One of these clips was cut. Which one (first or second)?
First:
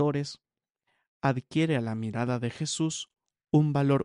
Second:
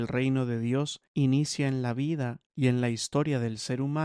second